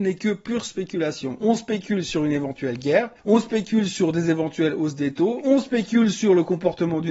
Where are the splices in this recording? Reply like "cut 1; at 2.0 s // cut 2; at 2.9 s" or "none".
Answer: cut 1; at 3.2 s